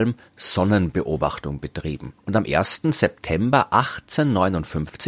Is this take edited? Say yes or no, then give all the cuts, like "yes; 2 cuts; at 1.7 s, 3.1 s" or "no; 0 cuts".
yes; 1 cut; at 2.2 s